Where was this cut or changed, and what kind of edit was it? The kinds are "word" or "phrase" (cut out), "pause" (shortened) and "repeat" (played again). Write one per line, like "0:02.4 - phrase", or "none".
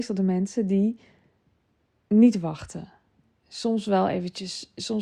none